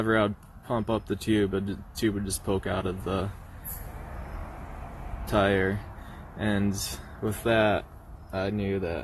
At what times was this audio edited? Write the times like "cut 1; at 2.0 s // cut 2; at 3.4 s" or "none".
none